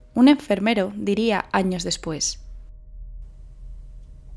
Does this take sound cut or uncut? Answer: uncut